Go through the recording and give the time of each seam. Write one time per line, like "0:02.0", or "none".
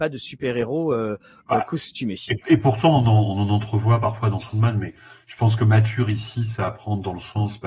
none